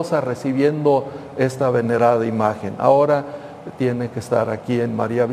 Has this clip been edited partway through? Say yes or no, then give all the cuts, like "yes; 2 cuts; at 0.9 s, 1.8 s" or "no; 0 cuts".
no; 0 cuts